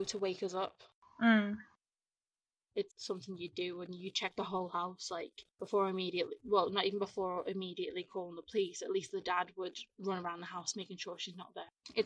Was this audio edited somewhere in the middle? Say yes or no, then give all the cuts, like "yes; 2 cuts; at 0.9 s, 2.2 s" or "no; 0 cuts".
yes; 2 cuts; at 2.9 s, 5.5 s